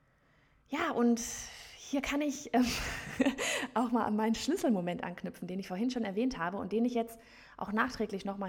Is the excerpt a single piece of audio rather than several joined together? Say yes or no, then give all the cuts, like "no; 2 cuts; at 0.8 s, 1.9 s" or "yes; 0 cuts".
yes; 0 cuts